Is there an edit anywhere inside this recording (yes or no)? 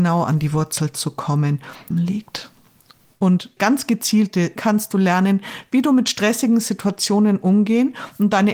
yes